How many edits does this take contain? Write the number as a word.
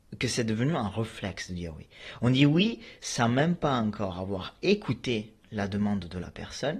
zero